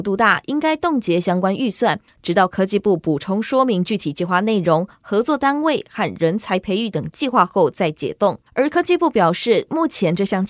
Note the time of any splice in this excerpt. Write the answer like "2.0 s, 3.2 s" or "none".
8.5 s